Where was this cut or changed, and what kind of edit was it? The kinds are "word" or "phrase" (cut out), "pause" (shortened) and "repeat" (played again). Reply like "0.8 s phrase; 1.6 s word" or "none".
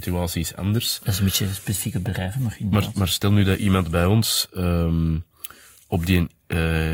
none